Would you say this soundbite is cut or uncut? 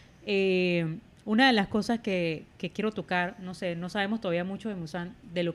uncut